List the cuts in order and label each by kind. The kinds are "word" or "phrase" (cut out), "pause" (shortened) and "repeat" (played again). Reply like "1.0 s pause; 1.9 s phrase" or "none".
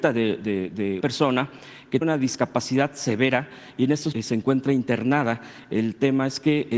1.0 s word; 2.0 s word; 4.1 s word